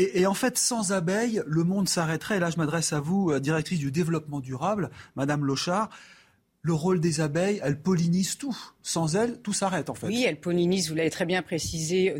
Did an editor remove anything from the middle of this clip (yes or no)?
no